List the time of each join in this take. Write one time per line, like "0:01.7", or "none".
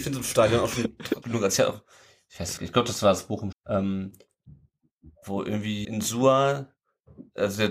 0:01.2
0:02.6
0:03.5
0:05.8